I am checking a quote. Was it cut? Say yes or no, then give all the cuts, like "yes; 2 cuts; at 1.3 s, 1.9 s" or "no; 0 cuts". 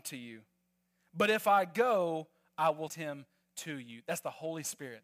yes; 1 cut; at 2.9 s